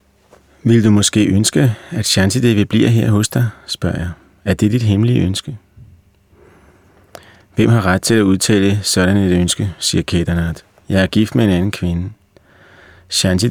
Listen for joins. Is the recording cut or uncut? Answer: uncut